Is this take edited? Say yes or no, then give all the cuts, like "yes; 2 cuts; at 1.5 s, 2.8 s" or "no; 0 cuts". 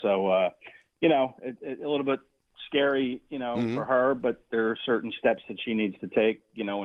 no; 0 cuts